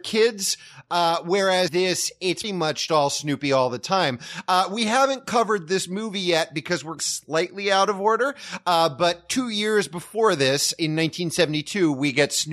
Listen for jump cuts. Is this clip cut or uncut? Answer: cut